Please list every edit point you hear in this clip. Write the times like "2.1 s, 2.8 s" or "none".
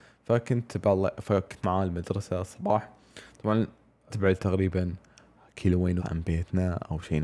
1.6 s, 4.1 s, 6.0 s